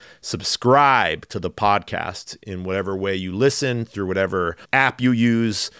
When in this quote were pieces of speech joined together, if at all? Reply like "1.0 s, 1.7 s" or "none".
4.6 s

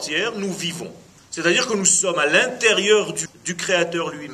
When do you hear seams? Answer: 1.2 s, 3.3 s

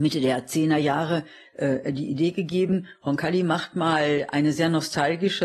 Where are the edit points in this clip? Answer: none

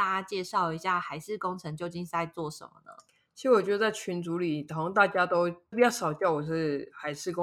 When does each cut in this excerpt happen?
none

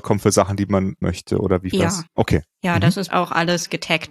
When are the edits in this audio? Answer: 1.0 s, 1.7 s, 2.1 s, 3.1 s

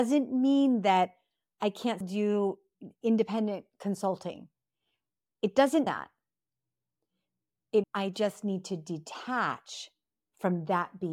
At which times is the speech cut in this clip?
2.0 s, 5.9 s, 7.8 s

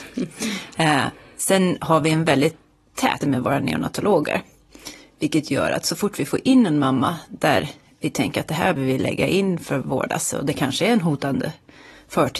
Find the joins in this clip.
3.2 s, 8.8 s

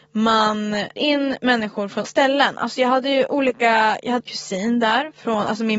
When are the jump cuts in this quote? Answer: 1.0 s, 2.1 s, 4.2 s

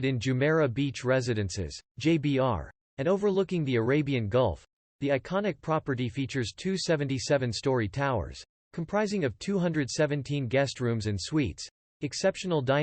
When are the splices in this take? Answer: none

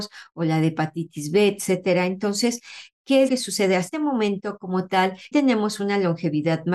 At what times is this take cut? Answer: 3.3 s, 3.9 s, 5.3 s

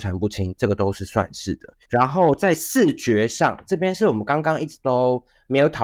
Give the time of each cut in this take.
1.8 s

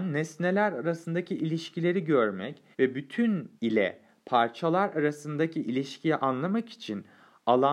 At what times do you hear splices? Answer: 2.7 s, 3.6 s

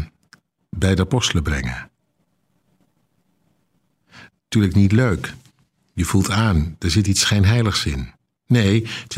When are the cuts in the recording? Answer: none

